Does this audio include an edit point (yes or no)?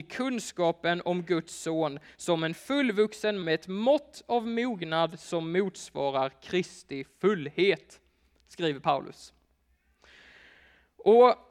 yes